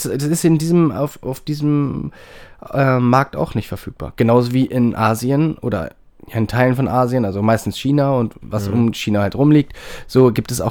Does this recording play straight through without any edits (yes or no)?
yes